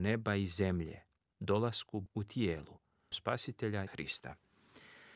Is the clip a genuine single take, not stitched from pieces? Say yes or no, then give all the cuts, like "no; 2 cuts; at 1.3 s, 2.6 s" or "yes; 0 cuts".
no; 3 cuts; at 2.1 s, 3.1 s, 3.9 s